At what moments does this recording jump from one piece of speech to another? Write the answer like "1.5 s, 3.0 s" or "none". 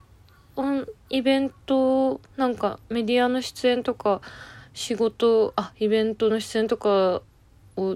2.3 s